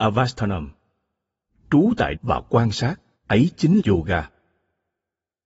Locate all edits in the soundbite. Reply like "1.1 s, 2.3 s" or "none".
2.1 s, 3.1 s, 3.8 s